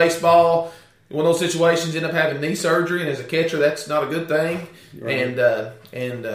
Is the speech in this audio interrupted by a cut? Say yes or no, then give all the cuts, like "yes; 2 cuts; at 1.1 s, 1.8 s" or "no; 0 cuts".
no; 0 cuts